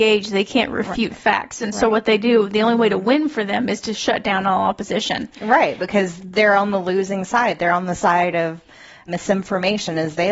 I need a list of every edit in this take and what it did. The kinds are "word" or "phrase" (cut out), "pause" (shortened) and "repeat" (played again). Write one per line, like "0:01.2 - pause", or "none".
none